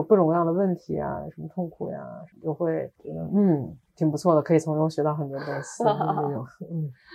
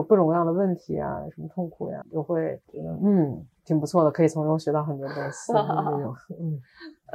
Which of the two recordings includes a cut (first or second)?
second